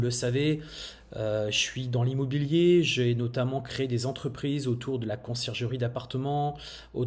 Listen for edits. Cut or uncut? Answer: uncut